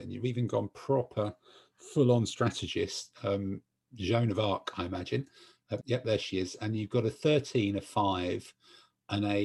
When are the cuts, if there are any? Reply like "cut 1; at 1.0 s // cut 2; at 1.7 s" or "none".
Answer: cut 1; at 5.8 s